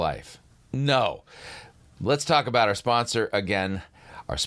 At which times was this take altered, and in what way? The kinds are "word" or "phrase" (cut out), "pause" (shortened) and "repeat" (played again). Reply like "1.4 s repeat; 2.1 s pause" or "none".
none